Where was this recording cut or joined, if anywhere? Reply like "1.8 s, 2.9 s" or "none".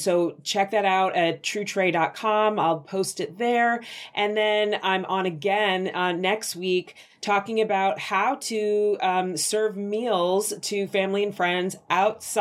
none